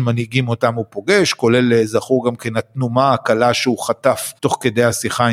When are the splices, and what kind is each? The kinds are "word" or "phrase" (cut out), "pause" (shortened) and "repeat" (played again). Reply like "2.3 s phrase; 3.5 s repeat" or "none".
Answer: 4.4 s pause